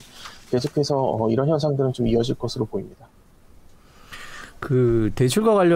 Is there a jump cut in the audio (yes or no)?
no